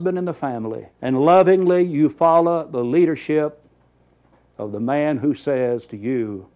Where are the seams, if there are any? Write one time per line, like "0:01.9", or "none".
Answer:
0:00.9